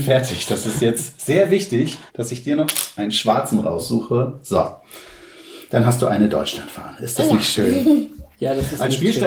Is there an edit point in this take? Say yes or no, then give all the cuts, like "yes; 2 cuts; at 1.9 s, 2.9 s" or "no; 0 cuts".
yes; 2 cuts; at 2.1 s, 8.3 s